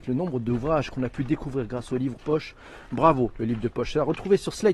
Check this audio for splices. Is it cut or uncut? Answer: cut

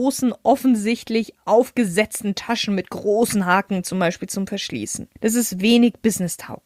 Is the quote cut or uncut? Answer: cut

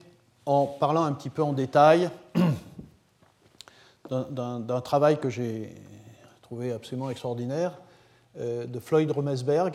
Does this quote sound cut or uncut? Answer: uncut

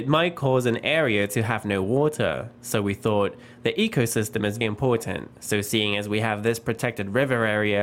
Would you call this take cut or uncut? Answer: cut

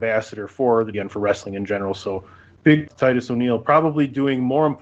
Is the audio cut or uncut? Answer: cut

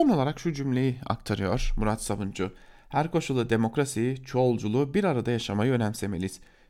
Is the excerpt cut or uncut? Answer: uncut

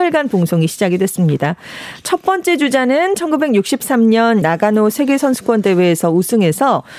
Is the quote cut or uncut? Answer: cut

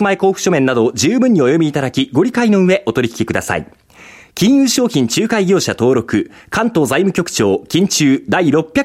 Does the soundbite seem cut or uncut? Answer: uncut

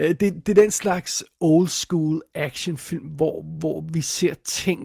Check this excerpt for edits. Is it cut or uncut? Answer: uncut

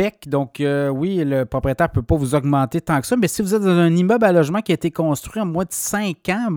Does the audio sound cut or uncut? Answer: uncut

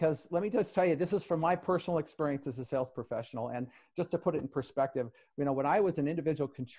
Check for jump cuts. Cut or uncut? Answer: uncut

